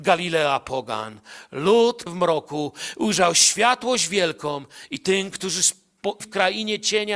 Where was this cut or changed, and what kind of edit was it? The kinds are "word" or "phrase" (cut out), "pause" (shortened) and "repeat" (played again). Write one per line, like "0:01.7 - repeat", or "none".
0:02.1 - word
0:06.2 - word